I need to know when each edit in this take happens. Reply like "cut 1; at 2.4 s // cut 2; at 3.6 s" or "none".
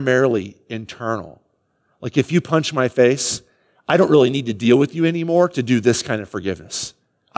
none